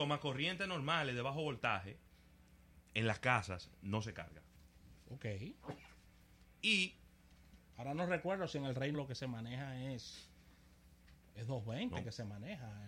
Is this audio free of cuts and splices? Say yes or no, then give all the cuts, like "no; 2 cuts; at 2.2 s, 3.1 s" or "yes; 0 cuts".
no; 1 cut; at 8.9 s